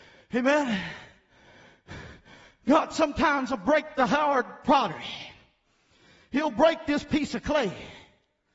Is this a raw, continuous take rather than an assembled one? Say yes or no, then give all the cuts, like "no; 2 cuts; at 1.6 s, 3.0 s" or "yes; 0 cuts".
yes; 0 cuts